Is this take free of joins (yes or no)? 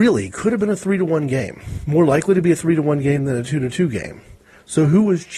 yes